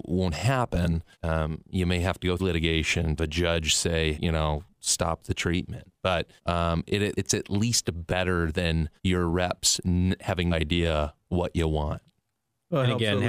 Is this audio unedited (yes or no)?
no